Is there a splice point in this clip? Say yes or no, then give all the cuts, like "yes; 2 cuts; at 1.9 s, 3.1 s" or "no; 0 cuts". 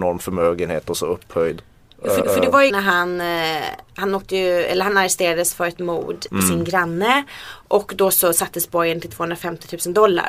yes; 3 cuts; at 2.2 s, 2.7 s, 6.3 s